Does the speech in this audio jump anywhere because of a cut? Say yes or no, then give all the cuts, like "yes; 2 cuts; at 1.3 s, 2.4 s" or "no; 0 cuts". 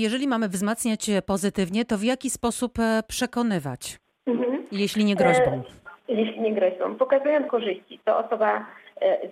yes; 3 cuts; at 4.1 s, 6.0 s, 7.5 s